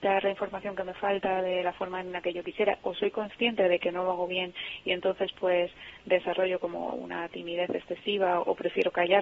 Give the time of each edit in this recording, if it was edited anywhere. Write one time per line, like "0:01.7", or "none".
none